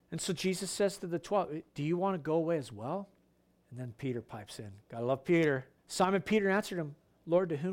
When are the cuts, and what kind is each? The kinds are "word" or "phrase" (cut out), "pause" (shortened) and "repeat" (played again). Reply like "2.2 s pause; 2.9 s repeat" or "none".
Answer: 1.7 s pause; 3.3 s pause; 4.8 s pause; 5.8 s pause